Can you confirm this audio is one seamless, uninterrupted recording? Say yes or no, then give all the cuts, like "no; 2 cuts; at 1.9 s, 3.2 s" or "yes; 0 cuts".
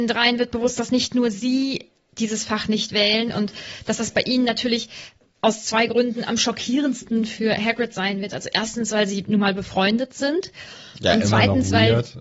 yes; 0 cuts